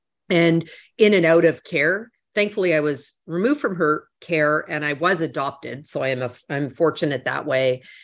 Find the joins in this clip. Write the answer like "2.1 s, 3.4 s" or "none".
none